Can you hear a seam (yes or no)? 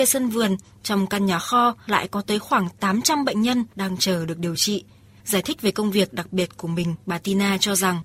no